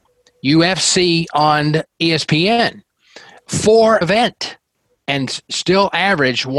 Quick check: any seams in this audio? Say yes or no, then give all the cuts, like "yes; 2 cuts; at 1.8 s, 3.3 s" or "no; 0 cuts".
yes; 1 cut; at 4.0 s